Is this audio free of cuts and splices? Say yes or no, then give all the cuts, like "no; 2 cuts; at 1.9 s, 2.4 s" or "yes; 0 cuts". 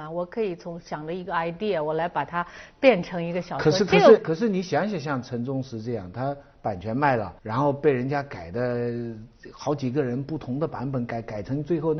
no; 2 cuts; at 4.2 s, 7.4 s